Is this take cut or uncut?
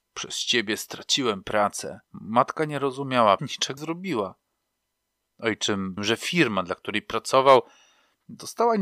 cut